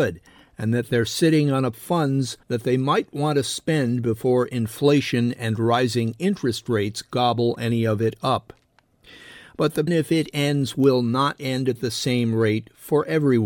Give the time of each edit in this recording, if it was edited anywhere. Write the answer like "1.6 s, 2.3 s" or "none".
1.7 s, 2.4 s, 9.9 s